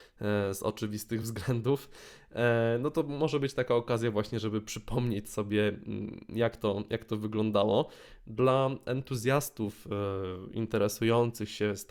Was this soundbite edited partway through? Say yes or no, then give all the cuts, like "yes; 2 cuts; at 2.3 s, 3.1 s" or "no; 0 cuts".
no; 0 cuts